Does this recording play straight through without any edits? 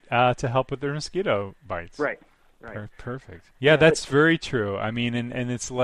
no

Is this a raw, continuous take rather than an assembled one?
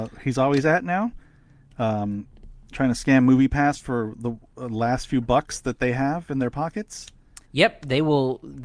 no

